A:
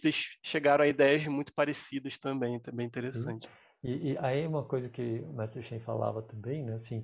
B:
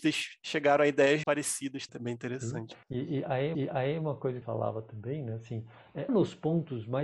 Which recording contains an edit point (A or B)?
B